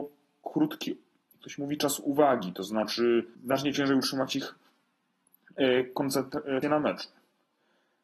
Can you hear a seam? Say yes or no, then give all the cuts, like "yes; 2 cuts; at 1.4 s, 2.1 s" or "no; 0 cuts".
yes; 2 cuts; at 3.3 s, 6.6 s